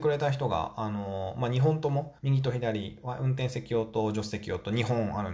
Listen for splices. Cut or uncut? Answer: cut